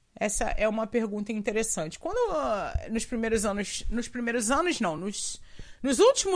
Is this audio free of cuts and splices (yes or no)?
yes